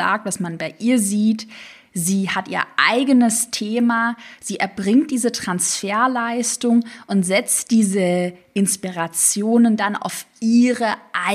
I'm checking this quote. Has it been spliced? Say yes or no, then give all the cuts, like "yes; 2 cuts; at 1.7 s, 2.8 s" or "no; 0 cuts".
no; 0 cuts